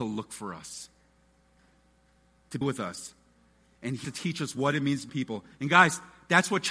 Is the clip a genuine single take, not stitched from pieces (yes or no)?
no